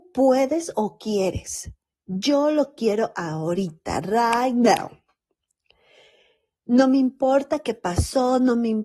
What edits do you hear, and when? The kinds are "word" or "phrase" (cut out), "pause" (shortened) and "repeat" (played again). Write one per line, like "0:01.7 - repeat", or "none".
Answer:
none